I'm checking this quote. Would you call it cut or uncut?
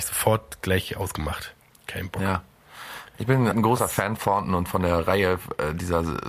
cut